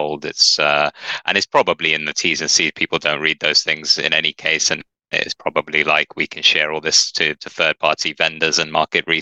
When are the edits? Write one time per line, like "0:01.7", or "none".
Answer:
none